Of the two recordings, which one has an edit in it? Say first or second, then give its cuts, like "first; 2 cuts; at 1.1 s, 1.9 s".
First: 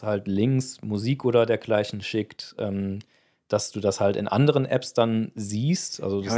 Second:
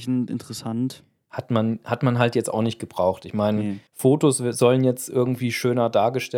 second; 1 cut; at 3.9 s